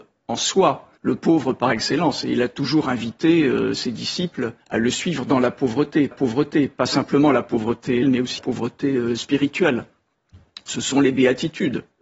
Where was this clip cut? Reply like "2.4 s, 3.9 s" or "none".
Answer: 1.0 s, 4.6 s, 6.1 s, 8.0 s, 8.4 s